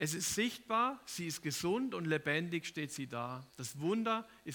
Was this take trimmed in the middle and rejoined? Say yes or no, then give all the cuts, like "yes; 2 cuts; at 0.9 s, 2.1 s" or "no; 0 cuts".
yes; 1 cut; at 3.5 s